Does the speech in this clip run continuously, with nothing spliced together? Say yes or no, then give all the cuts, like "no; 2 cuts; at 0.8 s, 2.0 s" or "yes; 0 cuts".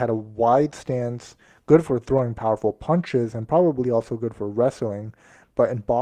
yes; 0 cuts